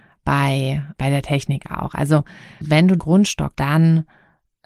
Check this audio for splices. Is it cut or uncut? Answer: cut